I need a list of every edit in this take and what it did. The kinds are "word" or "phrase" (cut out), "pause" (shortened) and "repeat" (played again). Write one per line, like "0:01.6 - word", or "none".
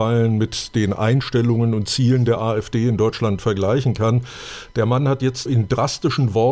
0:05.5 - word